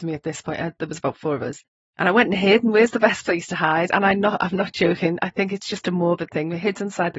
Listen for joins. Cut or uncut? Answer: uncut